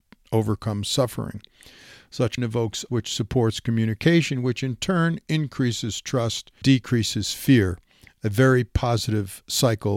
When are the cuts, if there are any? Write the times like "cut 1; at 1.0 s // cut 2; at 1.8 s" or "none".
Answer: cut 1; at 2.4 s // cut 2; at 2.9 s // cut 3; at 6.6 s